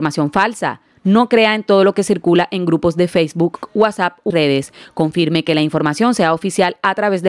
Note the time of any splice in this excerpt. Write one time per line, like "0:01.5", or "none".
0:04.3